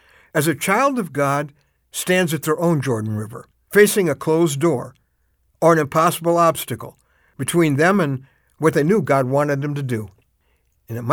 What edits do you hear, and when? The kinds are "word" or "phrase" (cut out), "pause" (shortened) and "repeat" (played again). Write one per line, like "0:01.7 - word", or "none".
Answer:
none